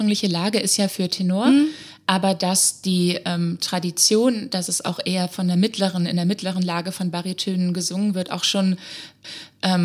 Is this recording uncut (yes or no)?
yes